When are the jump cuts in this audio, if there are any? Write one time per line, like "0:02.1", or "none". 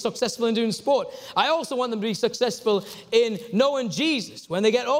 none